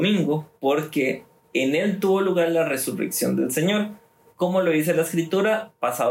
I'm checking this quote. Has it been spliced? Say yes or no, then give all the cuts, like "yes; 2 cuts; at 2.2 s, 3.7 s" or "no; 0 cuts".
no; 0 cuts